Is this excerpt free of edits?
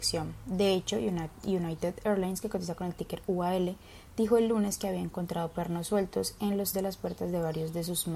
no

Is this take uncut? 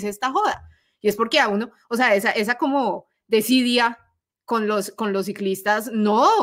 no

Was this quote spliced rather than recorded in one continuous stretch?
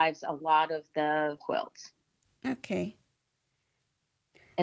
yes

